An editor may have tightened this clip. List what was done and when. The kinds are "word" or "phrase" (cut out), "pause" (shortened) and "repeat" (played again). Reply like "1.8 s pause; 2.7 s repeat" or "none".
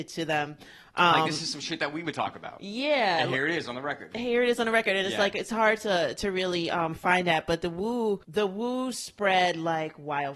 8.2 s pause